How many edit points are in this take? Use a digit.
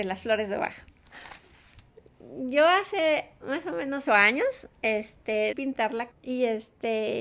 3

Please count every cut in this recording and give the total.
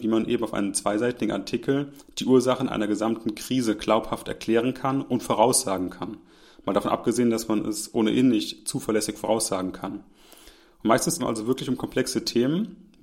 1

